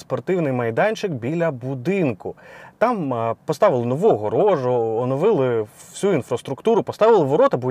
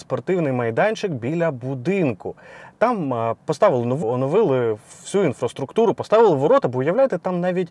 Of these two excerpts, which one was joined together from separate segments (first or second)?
second